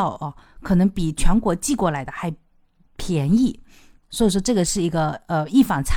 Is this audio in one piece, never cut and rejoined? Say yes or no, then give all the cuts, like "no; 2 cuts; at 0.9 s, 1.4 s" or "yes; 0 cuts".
yes; 0 cuts